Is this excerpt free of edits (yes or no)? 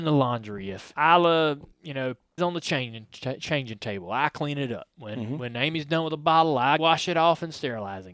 no